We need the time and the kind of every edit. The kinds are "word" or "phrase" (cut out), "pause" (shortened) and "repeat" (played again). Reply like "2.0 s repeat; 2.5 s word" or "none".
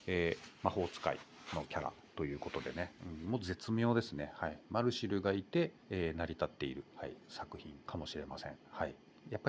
5.8 s pause; 6.9 s pause; 7.8 s pause